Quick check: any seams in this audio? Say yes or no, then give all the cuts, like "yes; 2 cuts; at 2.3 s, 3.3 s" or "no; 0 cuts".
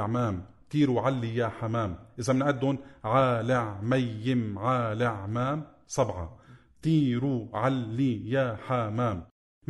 no; 0 cuts